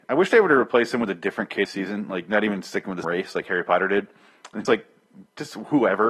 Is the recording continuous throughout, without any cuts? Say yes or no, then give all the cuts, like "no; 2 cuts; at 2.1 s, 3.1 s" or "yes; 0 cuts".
no; 3 cuts; at 1.6 s, 3.0 s, 4.6 s